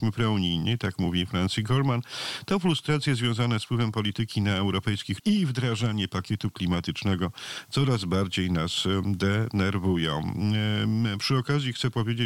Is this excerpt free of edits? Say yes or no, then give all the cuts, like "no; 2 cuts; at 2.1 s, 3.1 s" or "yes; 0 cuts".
no; 1 cut; at 5.2 s